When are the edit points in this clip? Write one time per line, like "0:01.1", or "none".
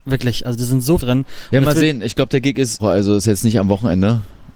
0:01.0
0:02.8